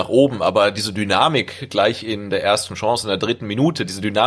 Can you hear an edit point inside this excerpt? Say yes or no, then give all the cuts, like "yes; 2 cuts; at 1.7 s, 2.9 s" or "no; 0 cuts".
no; 0 cuts